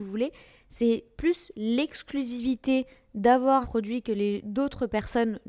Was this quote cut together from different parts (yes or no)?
yes